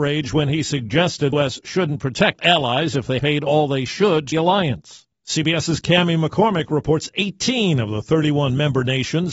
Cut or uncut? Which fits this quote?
cut